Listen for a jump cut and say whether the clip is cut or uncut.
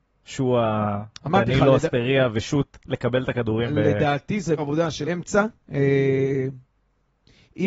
cut